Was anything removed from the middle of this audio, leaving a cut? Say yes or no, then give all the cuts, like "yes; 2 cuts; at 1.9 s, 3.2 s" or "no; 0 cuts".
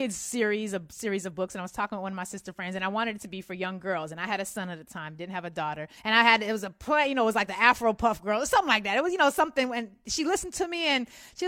yes; 1 cut; at 6.0 s